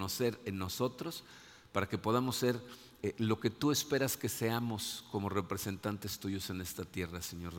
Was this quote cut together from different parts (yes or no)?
no